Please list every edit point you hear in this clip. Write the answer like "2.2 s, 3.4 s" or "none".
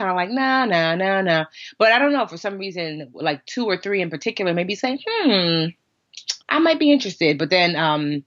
6.4 s